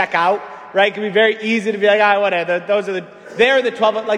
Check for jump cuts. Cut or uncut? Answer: uncut